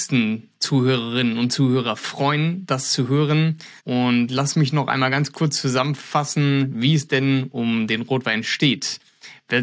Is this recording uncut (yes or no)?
no